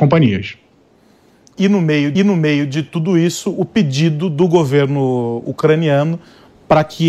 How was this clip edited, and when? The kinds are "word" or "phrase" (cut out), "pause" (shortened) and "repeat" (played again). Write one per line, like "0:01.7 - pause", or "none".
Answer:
0:02.1 - repeat

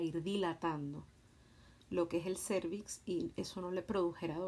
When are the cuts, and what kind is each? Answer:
none

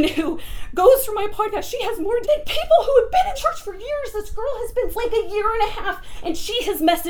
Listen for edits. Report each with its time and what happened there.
0:02.2 - word
0:03.3 - word
0:04.9 - word

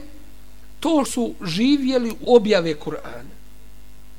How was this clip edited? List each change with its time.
0:01.1 - word
0:02.2 - word

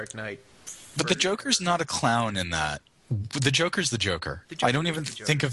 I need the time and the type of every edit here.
none

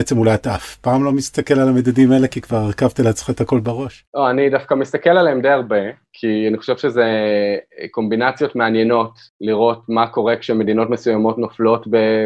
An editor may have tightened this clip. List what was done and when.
none

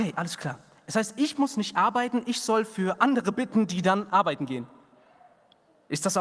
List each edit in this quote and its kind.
none

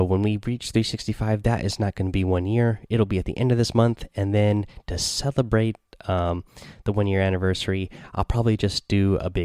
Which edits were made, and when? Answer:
none

